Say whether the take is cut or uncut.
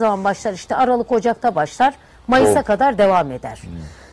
uncut